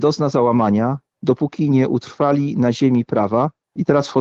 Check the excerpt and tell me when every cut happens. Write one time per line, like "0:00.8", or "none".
none